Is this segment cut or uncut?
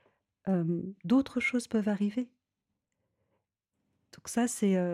uncut